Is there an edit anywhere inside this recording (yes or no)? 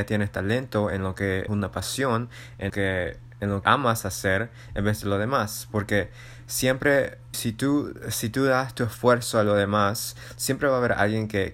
yes